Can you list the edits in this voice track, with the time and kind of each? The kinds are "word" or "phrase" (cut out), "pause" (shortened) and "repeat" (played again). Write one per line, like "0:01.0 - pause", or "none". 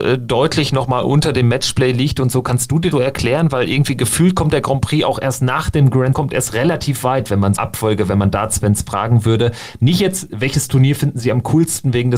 0:02.9 - word
0:06.1 - word
0:07.6 - word